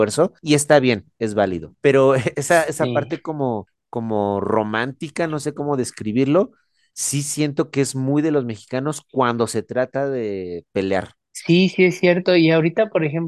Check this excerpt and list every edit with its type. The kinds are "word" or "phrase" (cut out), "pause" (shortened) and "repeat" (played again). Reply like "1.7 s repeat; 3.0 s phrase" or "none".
none

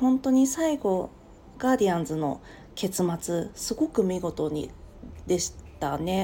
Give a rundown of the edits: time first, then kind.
1.5 s phrase

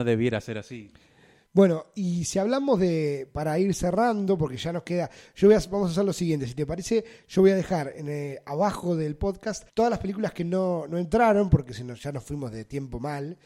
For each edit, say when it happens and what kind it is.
9.7 s pause

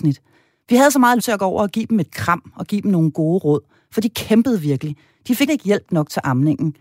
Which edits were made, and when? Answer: 1.2 s word; 5.5 s word

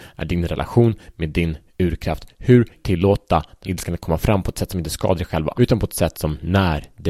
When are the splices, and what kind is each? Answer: 2.8 s phrase; 3.6 s word; 5.5 s word

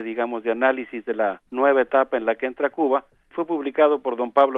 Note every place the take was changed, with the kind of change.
1.5 s pause; 3.3 s word

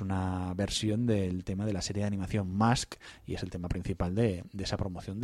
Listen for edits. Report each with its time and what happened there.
none

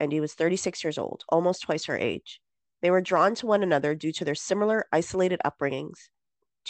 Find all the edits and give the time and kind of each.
none

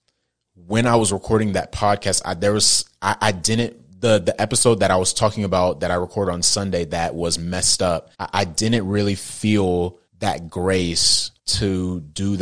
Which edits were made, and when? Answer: 8.1 s pause; 10.1 s pause; 11.4 s pause

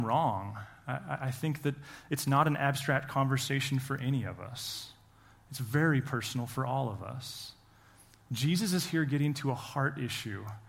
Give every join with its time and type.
none

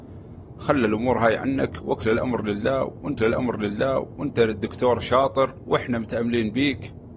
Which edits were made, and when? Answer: 3.2 s repeat

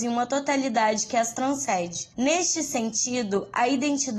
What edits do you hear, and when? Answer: 2.1 s pause

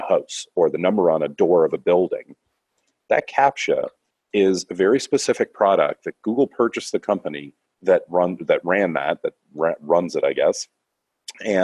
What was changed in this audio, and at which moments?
none

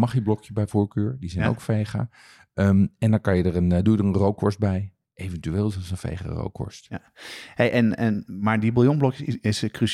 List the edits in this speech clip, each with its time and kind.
none

